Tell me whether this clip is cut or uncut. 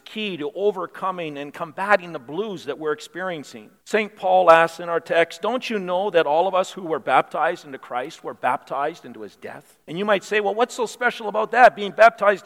cut